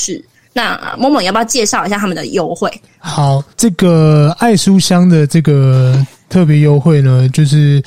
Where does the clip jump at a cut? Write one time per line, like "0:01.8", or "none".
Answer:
0:03.5